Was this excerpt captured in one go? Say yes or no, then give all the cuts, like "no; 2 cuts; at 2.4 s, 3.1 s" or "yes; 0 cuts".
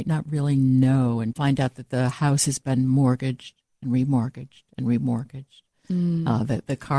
yes; 0 cuts